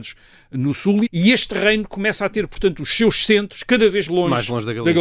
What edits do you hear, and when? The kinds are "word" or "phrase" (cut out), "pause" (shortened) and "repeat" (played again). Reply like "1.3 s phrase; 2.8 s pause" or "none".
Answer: 1.1 s word; 4.1 s word

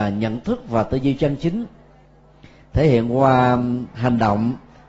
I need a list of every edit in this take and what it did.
none

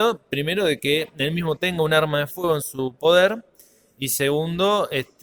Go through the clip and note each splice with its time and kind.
none

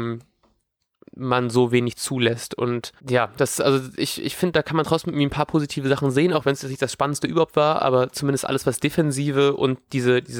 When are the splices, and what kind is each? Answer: 3.0 s pause

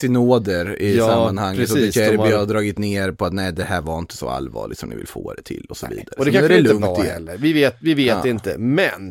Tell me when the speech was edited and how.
none

